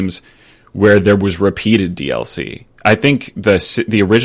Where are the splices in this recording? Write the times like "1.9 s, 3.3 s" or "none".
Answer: none